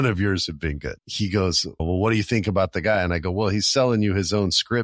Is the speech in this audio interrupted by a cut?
yes; 1 cut; at 1.0 s

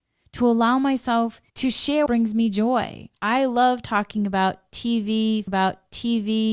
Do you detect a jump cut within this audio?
yes; 3 cuts; at 1.5 s, 2.1 s, 5.5 s

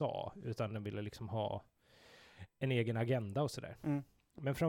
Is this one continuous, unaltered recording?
yes; 0 cuts

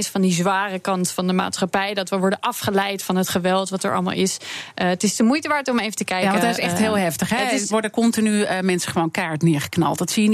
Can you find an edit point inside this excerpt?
yes; 1 cut; at 7.7 s

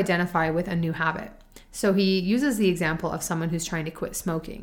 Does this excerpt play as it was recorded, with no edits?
yes; 0 cuts

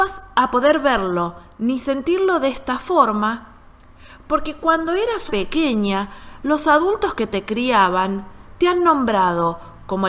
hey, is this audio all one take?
no; 1 cut; at 5.3 s

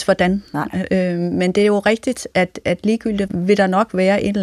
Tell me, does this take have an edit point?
yes; 1 cut; at 3.3 s

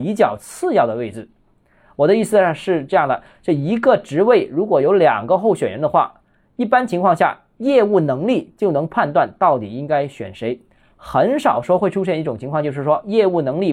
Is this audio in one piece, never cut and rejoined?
yes; 0 cuts

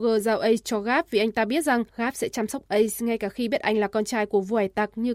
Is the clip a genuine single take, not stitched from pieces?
no; 1 cut; at 1.9 s

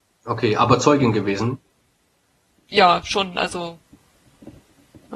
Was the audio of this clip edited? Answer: no; 0 cuts

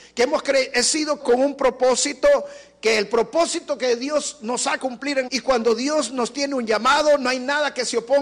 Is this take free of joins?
no; 3 cuts; at 1.2 s, 4.8 s, 5.3 s

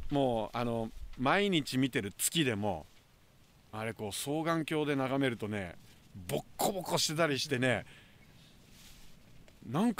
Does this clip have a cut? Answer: no; 0 cuts

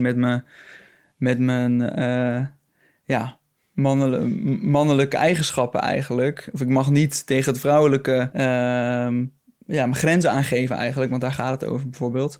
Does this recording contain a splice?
yes; 1 cut; at 8.3 s

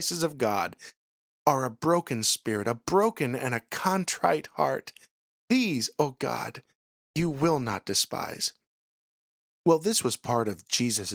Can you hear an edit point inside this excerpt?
no; 0 cuts

